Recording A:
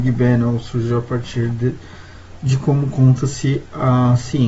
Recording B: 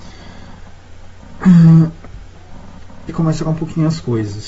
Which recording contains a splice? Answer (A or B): B